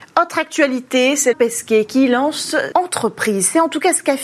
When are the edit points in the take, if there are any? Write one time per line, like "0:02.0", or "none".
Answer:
0:01.3
0:02.7